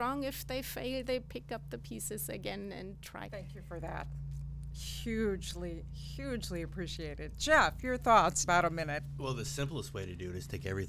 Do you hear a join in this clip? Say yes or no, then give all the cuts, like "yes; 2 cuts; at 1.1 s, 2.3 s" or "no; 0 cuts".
yes; 2 cuts; at 3.3 s, 8.4 s